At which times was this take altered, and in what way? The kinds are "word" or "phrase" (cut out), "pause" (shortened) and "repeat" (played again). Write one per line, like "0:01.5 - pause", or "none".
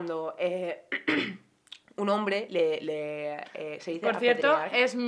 none